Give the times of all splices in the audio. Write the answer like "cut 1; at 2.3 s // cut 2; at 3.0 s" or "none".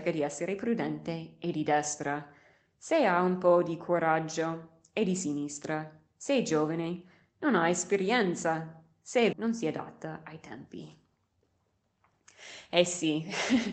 cut 1; at 9.3 s